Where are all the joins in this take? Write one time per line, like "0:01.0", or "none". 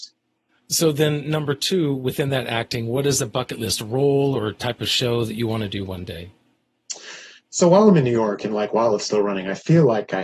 none